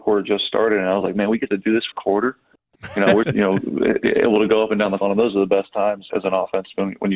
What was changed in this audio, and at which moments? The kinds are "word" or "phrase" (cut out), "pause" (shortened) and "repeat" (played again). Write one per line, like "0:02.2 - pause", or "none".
0:01.9 - word
0:03.2 - word
0:05.0 - word
0:06.1 - word